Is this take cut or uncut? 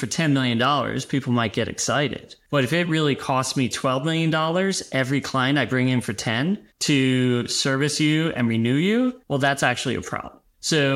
uncut